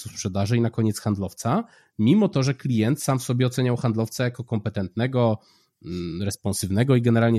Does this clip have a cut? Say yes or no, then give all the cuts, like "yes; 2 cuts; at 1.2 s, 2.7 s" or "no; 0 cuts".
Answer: no; 0 cuts